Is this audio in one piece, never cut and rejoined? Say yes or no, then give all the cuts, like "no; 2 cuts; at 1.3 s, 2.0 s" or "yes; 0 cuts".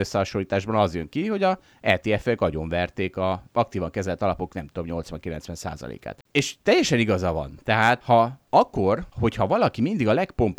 yes; 0 cuts